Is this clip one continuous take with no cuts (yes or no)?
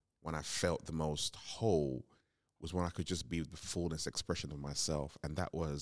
yes